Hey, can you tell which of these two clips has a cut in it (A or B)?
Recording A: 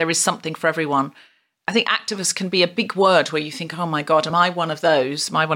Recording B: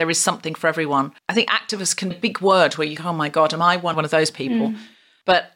B